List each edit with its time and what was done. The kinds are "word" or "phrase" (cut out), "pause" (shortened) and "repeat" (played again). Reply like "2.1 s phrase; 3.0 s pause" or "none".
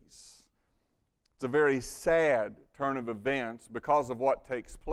none